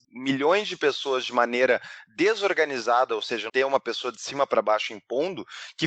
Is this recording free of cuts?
no; 1 cut; at 3.5 s

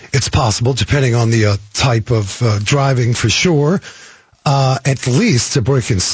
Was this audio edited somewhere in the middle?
no; 0 cuts

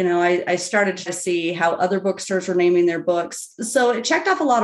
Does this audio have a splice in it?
yes; 1 cut; at 1.1 s

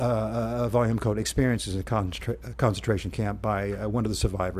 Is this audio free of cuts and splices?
yes; 0 cuts

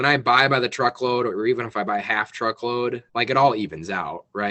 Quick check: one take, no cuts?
no; 1 cut; at 3.1 s

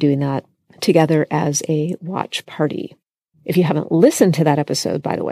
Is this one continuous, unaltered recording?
yes; 0 cuts

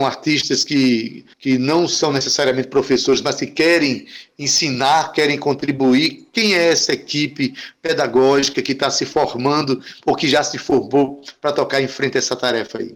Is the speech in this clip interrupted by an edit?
yes; 1 cut; at 1.3 s

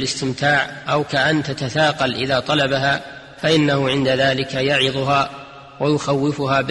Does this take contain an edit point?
no; 0 cuts

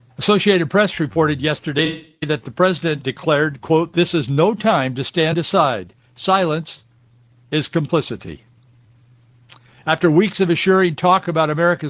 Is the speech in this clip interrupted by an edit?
no; 0 cuts

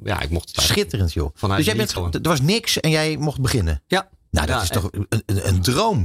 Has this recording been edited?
yes; 1 cut; at 2.0 s

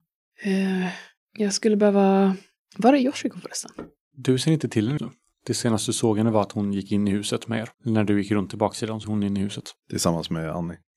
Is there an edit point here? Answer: yes; 3 cuts; at 5.0 s, 7.7 s, 9.0 s

